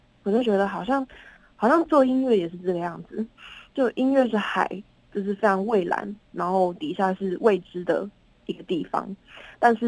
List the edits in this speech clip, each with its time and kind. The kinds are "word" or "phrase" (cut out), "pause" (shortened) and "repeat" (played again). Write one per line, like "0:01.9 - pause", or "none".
none